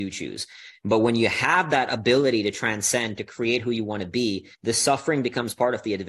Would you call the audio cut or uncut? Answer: cut